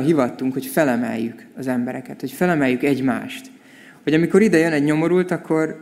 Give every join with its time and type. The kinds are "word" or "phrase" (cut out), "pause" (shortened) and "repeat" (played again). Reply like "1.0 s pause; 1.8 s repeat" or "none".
none